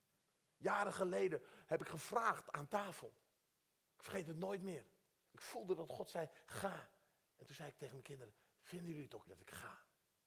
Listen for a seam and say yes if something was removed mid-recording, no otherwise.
yes